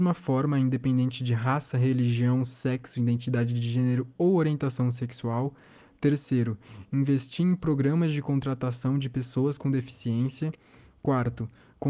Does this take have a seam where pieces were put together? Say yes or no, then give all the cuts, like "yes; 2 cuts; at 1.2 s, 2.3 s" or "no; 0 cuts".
no; 0 cuts